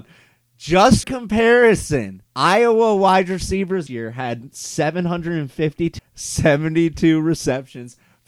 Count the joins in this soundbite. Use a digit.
4